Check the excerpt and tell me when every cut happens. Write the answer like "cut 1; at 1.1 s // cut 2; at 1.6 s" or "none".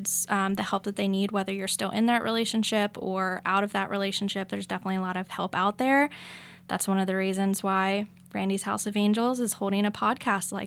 none

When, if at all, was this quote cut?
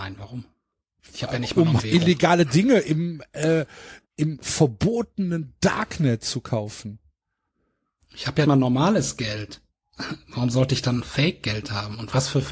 cut 1; at 1.8 s // cut 2; at 4.0 s // cut 3; at 8.4 s

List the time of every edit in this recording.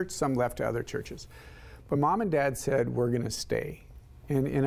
cut 1; at 2.0 s

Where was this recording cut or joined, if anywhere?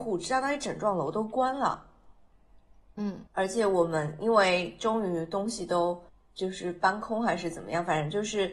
cut 1; at 3.3 s // cut 2; at 6.1 s

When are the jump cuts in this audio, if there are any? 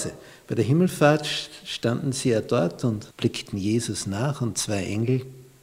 cut 1; at 3.1 s

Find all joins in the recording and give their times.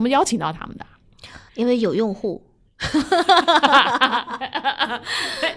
cut 1; at 1.5 s

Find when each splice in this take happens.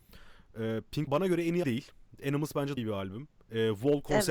cut 1; at 1.1 s // cut 2; at 1.6 s // cut 3; at 2.8 s

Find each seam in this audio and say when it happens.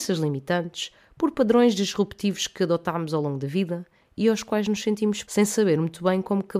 cut 1; at 5.2 s

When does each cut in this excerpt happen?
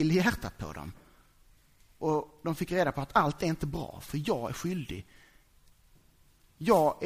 none

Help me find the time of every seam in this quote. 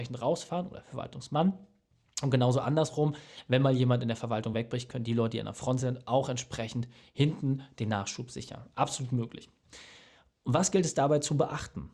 none

